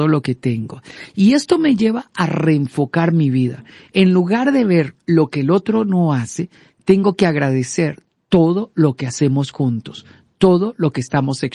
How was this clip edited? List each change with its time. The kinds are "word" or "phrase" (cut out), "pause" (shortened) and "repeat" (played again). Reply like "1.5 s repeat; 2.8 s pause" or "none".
none